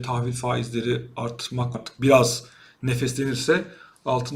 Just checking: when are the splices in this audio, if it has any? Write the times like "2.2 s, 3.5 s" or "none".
1.7 s